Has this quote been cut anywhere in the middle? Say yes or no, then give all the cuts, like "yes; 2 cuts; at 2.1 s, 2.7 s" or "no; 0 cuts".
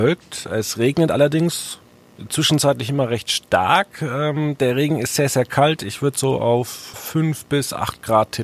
yes; 1 cut; at 6.9 s